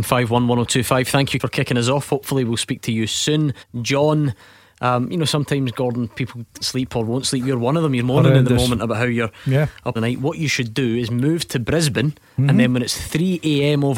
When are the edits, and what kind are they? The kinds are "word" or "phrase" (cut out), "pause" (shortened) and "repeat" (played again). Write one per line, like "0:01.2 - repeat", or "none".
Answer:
0:01.4 - word
0:03.6 - pause
0:06.6 - word
0:08.0 - word
0:10.0 - phrase